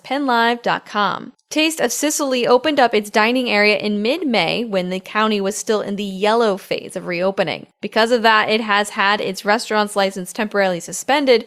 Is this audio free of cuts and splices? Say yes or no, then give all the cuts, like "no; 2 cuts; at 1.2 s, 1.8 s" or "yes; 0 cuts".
yes; 0 cuts